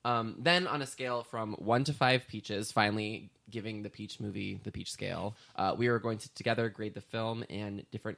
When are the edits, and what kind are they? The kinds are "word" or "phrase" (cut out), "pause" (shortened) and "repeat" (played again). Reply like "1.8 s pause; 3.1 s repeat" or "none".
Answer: none

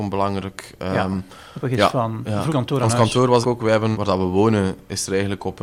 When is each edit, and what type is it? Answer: 1.6 s phrase; 2.5 s phrase; 3.4 s word; 3.9 s word

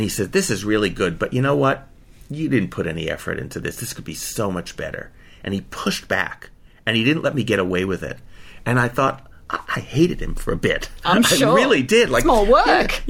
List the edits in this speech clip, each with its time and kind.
none

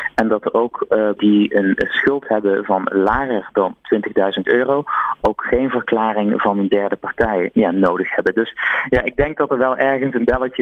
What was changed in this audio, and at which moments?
1.2 s word; 7.5 s word

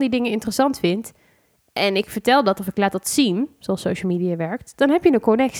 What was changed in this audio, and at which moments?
none

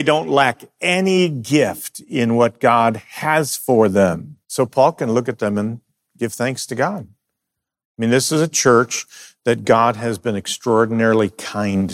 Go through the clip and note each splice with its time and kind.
4.4 s pause

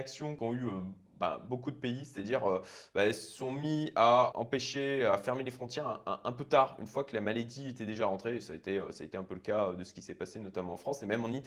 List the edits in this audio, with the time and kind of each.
none

